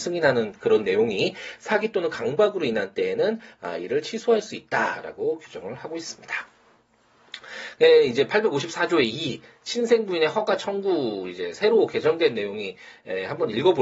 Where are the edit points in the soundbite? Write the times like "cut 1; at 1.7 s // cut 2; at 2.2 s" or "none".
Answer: none